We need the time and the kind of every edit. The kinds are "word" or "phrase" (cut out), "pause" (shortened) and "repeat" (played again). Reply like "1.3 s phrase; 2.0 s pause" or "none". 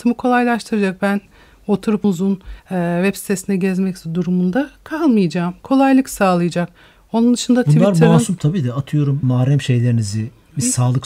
2.0 s word; 2.6 s pause; 9.2 s word